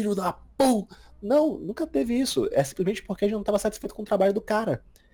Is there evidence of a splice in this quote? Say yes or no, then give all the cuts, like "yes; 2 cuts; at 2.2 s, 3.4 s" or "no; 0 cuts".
no; 0 cuts